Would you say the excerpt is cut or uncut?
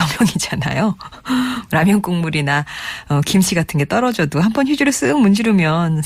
uncut